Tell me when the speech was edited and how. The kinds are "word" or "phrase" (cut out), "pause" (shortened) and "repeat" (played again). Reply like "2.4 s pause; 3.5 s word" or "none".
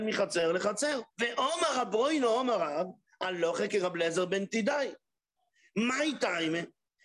1.1 s pause; 3.7 s word